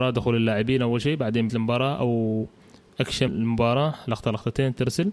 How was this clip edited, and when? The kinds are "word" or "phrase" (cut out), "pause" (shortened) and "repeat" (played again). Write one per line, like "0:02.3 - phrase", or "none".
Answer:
0:01.5 - word
0:03.3 - word